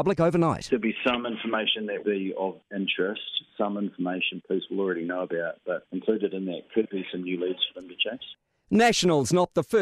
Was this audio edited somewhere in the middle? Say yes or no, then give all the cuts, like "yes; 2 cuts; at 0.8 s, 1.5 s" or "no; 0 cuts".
yes; 1 cut; at 2.0 s